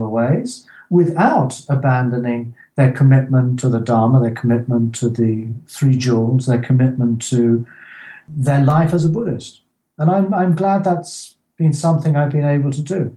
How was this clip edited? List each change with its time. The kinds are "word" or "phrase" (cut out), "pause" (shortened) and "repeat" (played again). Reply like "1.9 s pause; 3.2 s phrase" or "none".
none